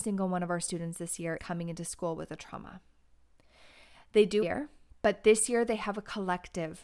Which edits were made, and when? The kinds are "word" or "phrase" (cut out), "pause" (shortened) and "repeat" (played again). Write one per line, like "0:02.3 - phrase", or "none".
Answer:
0:01.4 - word
0:04.4 - word
0:04.9 - pause